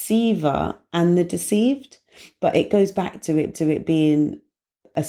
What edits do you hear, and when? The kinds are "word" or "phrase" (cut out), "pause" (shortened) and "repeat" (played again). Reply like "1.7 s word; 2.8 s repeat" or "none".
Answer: 3.5 s repeat